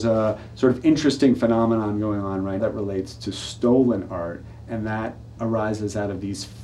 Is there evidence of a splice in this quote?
yes; 2 cuts; at 2.6 s, 5.4 s

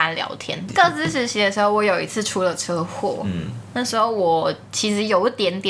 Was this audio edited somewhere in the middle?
no; 0 cuts

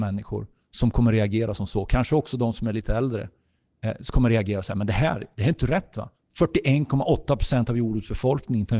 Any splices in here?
no; 0 cuts

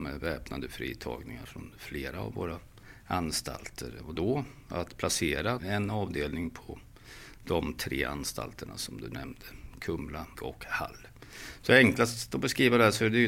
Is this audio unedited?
no; 4 cuts; at 1.4 s, 4.1 s, 5.6 s, 10.3 s

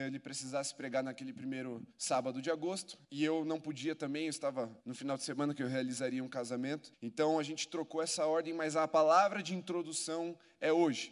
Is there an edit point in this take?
yes; 4 cuts; at 1.9 s, 3.0 s, 4.8 s, 6.9 s

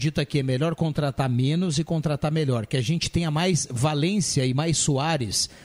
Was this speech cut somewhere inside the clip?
no; 0 cuts

